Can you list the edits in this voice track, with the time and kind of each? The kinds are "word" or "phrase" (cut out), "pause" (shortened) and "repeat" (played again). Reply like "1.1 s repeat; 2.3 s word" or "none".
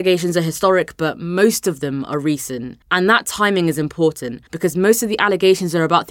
2.8 s pause; 4.5 s pause